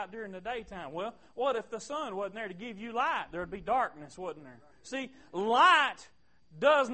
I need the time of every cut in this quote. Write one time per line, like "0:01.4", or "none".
0:04.7